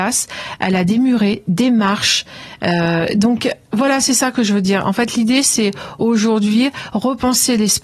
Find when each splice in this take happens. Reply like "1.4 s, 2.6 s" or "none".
none